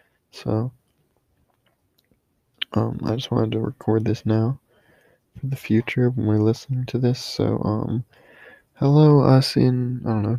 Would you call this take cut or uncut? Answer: uncut